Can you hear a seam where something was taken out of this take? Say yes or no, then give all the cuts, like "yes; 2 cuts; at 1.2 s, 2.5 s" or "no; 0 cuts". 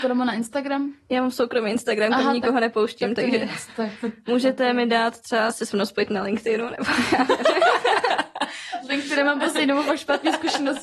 no; 0 cuts